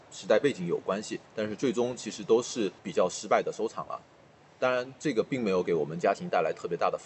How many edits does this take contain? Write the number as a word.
two